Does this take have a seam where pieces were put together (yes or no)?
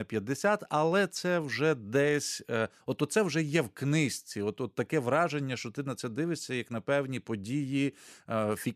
no